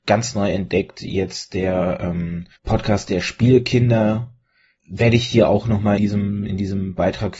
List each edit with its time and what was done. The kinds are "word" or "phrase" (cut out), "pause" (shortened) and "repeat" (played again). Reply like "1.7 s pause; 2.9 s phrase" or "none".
2.6 s pause; 4.8 s word; 6.0 s word